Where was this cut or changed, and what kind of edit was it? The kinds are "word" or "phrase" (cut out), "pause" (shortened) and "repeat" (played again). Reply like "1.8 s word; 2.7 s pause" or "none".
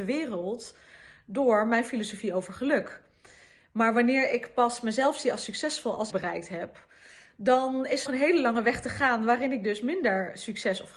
6.1 s phrase; 8.0 s word